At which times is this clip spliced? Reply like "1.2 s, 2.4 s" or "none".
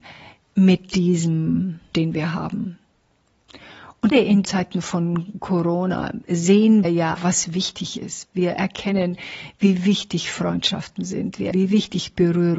1.9 s, 4.1 s, 4.4 s, 6.8 s, 7.2 s, 11.5 s

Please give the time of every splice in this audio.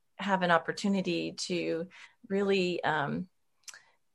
2.0 s

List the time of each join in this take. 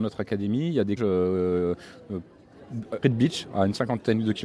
1.0 s, 3.0 s

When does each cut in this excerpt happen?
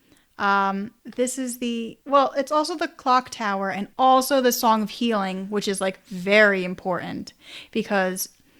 1.0 s, 2.0 s, 3.9 s

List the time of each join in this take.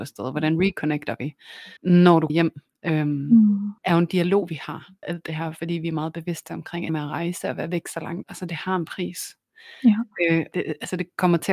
1.8 s, 2.3 s, 3.8 s, 5.0 s, 6.9 s, 8.2 s, 10.5 s

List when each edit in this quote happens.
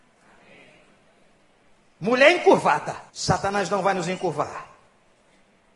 3.1 s

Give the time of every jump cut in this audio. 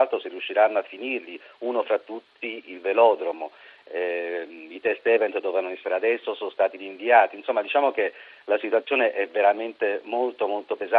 none

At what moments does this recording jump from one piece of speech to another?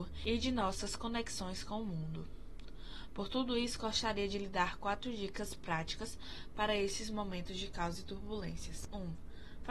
none

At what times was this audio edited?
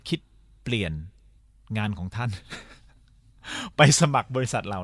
1.4 s

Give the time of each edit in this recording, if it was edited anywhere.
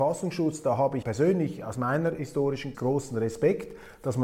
1.0 s, 2.7 s

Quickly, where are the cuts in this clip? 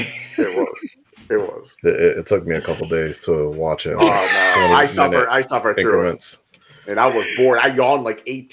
none

